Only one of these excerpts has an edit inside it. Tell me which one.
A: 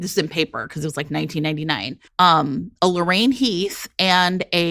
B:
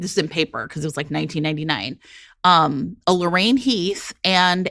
A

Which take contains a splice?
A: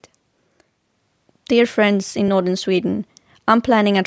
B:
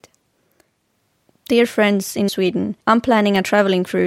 B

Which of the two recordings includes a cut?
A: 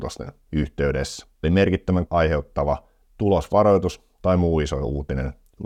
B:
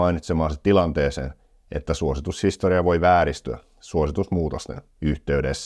A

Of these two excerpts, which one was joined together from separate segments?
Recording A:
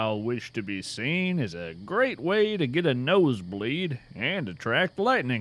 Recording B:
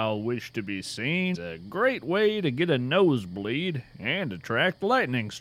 B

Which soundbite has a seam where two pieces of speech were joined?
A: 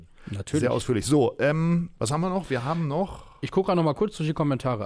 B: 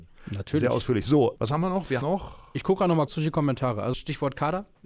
B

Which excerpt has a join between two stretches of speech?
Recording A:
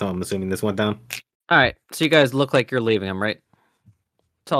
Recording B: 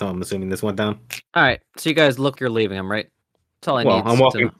B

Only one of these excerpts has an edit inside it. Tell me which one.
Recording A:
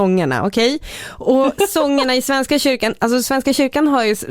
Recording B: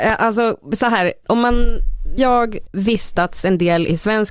B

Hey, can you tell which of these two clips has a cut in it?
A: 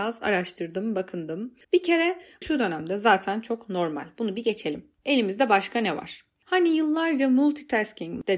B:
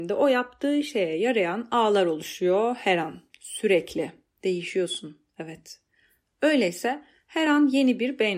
A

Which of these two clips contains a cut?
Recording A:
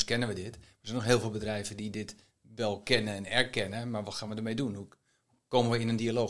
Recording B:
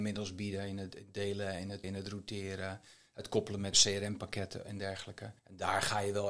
B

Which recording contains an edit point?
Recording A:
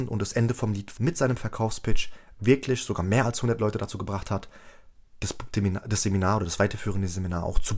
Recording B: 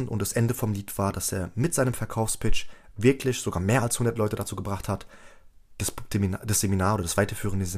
A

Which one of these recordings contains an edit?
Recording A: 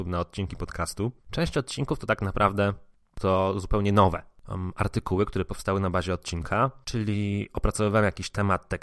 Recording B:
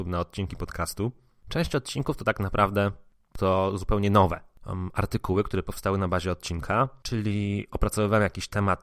A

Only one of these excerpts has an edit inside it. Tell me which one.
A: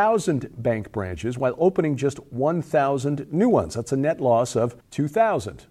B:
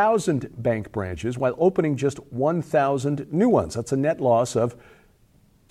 A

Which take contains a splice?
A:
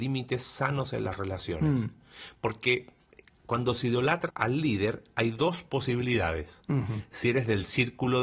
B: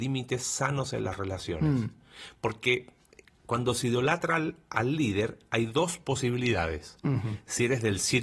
A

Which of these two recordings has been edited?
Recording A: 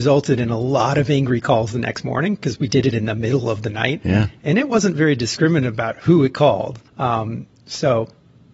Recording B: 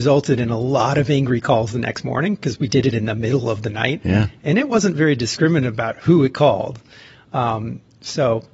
A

